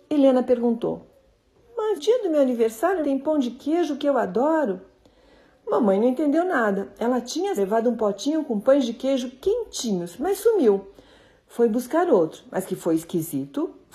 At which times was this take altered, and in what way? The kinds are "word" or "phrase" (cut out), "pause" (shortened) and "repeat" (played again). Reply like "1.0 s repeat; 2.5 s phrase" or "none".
2.0 s word; 3.0 s word; 7.6 s word